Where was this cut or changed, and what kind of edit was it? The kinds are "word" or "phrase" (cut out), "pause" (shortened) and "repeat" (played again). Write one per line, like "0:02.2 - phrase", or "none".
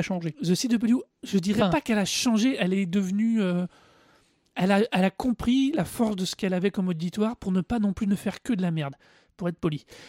0:01.1 - pause